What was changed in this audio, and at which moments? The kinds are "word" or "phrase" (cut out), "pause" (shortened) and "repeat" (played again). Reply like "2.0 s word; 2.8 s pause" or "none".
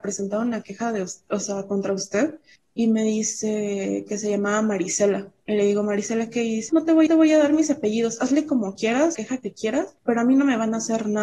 2.6 s pause; 5.4 s pause; 6.7 s word; 7.1 s repeat; 9.1 s phrase; 10.0 s pause